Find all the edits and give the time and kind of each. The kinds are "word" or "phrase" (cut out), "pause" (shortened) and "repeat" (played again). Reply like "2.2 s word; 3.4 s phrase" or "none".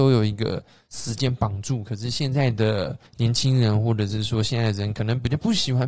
3.1 s pause